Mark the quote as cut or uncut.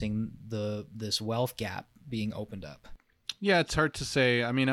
uncut